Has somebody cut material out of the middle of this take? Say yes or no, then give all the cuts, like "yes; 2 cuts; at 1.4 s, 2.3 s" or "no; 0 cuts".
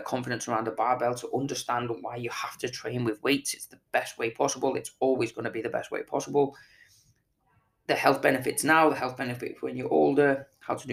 no; 0 cuts